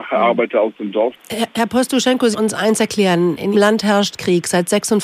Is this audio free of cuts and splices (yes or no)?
no